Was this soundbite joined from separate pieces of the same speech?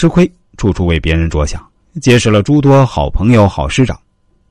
no; 0 cuts

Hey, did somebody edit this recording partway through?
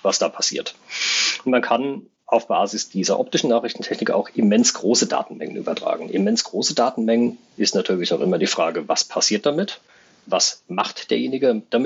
no; 0 cuts

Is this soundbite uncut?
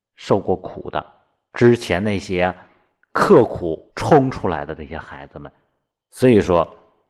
no; 1 cut; at 3.9 s

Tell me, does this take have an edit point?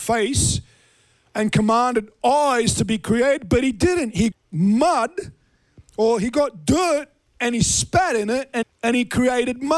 yes; 2 cuts; at 4.3 s, 8.6 s

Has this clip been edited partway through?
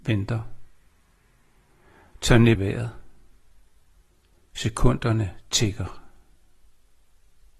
yes; 1 cut; at 2.6 s

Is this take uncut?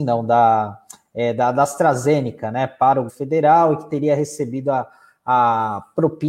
no; 1 cut; at 3.1 s

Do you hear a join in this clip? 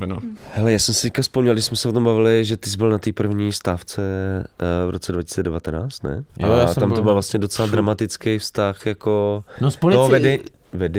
yes; 1 cut; at 6.3 s

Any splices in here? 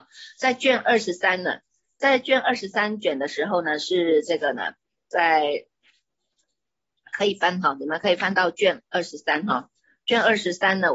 no; 0 cuts

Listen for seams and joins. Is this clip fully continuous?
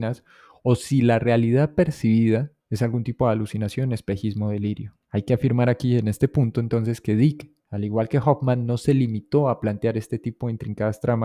no; 3 cuts; at 2.6 s, 5.0 s, 7.6 s

